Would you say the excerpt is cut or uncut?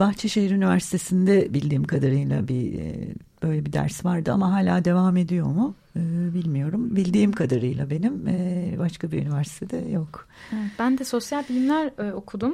uncut